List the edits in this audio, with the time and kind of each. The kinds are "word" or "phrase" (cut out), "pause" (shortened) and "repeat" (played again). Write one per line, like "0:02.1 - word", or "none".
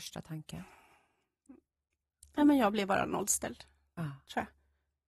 none